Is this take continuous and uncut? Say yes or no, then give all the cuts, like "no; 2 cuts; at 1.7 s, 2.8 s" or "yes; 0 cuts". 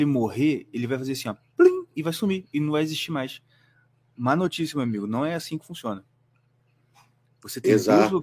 yes; 0 cuts